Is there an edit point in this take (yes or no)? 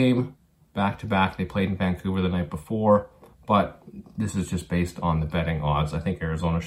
no